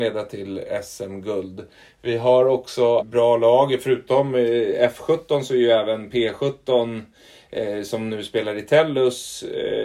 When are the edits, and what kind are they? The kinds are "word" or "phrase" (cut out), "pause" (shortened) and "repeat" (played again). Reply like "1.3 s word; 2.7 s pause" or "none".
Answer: 3.0 s word